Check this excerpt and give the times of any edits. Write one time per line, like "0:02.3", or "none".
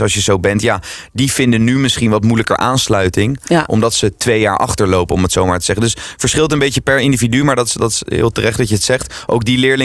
none